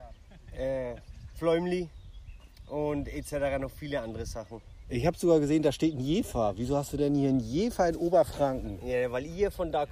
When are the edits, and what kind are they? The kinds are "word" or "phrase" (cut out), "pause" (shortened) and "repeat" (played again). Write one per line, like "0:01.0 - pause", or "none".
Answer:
none